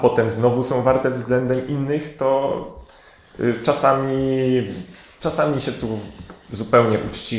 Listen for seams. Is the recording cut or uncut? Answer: uncut